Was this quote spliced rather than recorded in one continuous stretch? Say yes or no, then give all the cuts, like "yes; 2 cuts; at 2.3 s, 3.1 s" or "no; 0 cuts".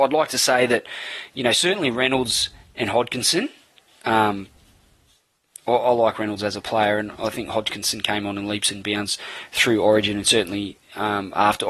no; 0 cuts